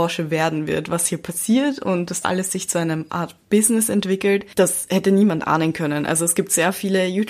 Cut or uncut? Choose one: cut